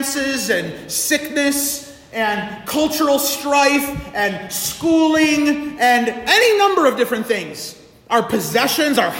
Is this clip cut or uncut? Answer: uncut